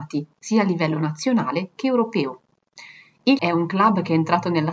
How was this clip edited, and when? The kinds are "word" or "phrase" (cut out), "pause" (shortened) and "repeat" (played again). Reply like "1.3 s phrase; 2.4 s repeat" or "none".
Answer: 3.4 s word